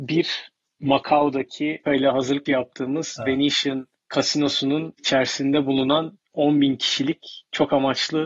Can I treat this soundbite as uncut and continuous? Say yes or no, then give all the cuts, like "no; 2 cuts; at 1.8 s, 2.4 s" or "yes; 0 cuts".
no; 2 cuts; at 1.9 s, 2.5 s